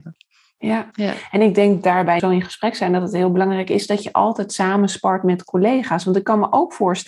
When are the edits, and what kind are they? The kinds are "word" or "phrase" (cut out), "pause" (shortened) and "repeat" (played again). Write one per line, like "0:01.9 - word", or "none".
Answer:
0:02.2 - phrase